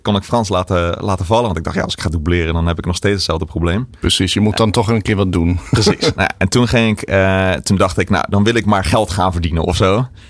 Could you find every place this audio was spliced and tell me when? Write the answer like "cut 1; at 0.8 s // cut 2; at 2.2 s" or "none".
none